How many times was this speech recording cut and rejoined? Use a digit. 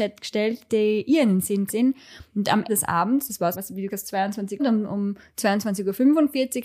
5